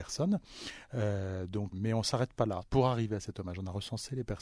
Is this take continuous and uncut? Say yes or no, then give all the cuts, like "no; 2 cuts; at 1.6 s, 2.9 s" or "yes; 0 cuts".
no; 1 cut; at 1.7 s